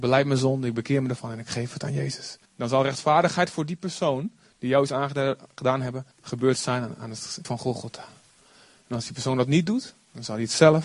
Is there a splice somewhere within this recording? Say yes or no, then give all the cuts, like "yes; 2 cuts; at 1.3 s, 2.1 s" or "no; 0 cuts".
yes; 3 cuts; at 2.4 s, 6.1 s, 7.4 s